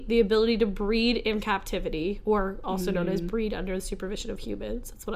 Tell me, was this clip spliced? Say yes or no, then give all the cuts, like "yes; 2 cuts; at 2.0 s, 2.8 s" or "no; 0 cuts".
no; 0 cuts